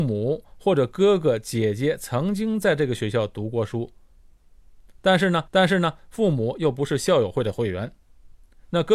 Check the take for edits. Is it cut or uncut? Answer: cut